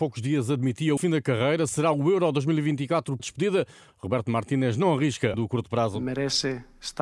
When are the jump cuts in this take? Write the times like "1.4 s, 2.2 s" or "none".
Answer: 1.0 s, 3.2 s, 5.3 s